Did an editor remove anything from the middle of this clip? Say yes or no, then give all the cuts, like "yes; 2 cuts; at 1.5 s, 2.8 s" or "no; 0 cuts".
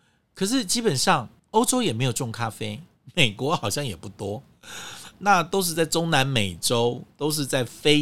yes; 1 cut; at 1.4 s